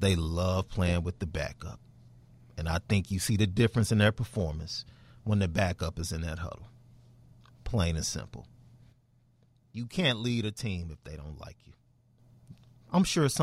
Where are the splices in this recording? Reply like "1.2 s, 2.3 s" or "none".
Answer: none